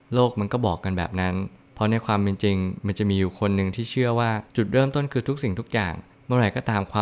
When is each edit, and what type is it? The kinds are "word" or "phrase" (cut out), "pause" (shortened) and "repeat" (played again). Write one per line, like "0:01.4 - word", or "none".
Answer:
0:04.5 - pause